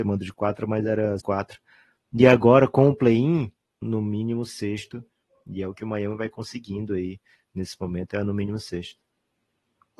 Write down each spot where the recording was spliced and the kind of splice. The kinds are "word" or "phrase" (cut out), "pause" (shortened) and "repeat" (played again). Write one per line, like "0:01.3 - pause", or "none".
0:01.2 - word
0:03.8 - word